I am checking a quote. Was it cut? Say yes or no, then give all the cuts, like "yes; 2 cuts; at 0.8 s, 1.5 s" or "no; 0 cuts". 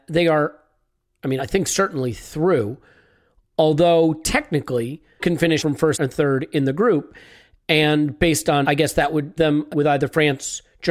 yes; 7 cuts; at 1.4 s, 5.2 s, 5.6 s, 5.9 s, 8.6 s, 9.4 s, 9.7 s